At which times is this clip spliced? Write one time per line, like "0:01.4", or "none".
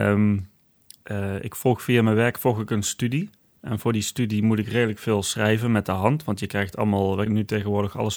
0:07.3